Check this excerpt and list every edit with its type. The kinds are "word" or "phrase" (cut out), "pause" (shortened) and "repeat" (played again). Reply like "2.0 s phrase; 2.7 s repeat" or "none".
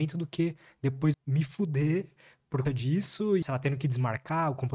1.1 s word; 2.6 s word; 3.4 s word